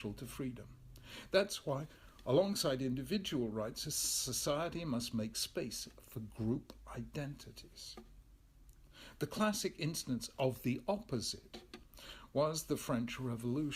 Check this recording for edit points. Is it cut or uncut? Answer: uncut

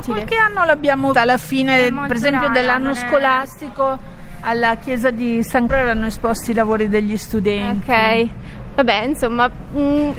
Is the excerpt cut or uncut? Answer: cut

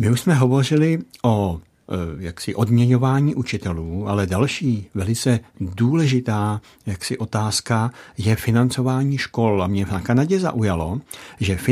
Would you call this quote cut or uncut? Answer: uncut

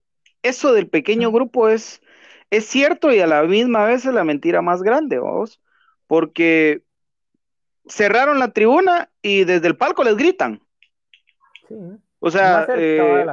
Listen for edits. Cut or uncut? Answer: uncut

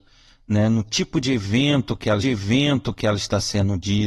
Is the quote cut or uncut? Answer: cut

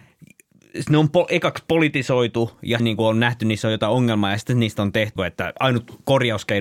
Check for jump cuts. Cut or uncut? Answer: cut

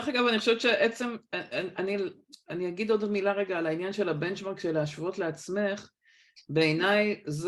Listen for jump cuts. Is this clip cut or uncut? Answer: uncut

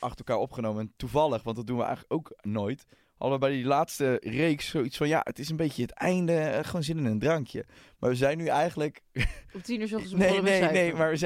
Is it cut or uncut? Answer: uncut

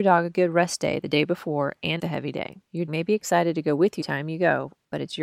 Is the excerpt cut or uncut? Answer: cut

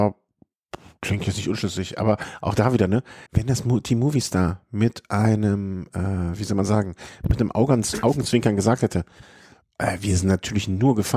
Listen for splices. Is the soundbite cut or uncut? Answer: cut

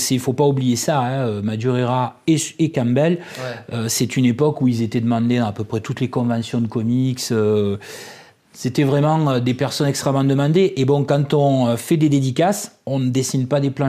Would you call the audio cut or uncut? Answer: uncut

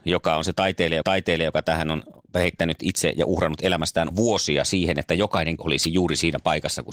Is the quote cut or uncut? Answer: cut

